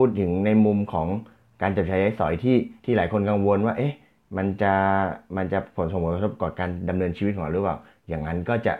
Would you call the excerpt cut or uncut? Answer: cut